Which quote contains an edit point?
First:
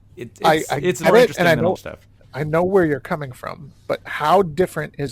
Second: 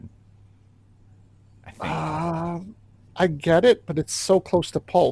first; 3 cuts; at 1.0 s, 1.8 s, 2.2 s

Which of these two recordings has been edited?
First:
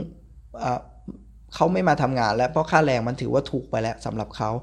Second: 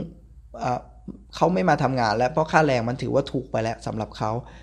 second; 1 cut; at 1.3 s

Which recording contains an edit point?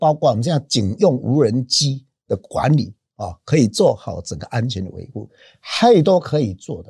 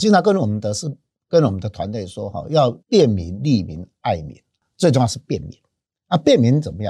second; 1 cut; at 2.8 s

